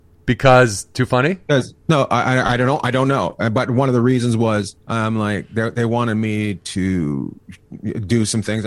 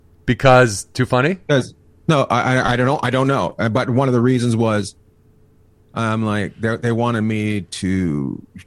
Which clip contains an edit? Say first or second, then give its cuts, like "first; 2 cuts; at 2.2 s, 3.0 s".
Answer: first; 2 cuts; at 1.8 s, 4.8 s